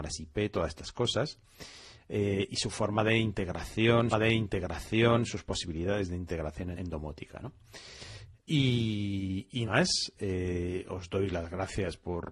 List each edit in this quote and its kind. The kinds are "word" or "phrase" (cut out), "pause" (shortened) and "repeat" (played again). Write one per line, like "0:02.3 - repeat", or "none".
0:04.1 - repeat
0:06.7 - word
0:08.4 - pause
0:09.7 - word

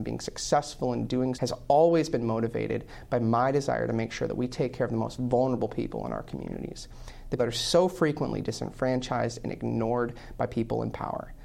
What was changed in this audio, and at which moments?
0:01.3 - word
0:07.4 - word

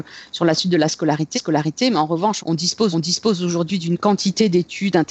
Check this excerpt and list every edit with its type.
0:01.3 - repeat
0:02.4 - word
0:02.9 - repeat

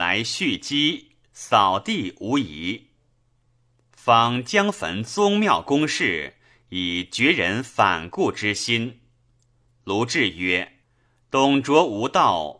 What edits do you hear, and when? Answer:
0:10.8 - pause

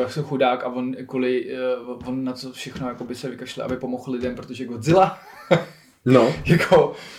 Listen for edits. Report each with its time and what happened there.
none

